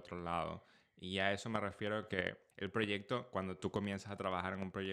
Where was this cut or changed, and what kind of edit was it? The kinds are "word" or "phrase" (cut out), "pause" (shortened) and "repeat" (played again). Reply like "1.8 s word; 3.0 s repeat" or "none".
2.5 s pause